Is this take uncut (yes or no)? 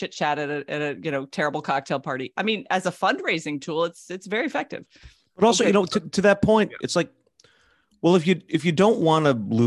yes